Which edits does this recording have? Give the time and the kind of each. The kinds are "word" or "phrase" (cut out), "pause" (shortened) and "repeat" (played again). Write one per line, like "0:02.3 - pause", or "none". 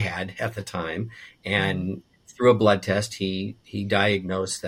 0:03.6 - pause